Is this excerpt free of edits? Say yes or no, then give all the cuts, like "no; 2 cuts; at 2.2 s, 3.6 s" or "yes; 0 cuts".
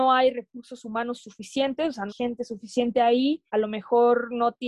no; 2 cuts; at 2.1 s, 3.5 s